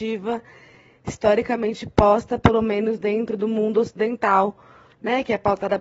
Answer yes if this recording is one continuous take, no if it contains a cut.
yes